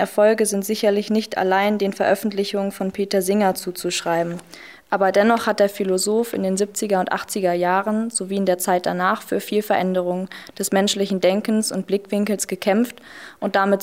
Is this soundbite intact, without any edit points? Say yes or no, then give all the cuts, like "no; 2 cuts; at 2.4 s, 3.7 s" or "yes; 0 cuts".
yes; 0 cuts